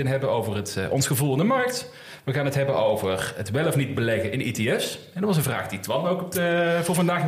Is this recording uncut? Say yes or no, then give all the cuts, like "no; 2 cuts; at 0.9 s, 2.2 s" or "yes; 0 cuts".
yes; 0 cuts